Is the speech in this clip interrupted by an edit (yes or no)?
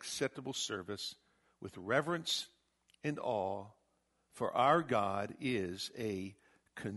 no